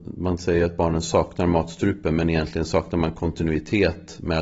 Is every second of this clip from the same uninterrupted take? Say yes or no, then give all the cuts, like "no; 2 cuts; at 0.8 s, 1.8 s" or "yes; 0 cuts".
yes; 0 cuts